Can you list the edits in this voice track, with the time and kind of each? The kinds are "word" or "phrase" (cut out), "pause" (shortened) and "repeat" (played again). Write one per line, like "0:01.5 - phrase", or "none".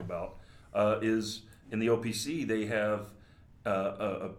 none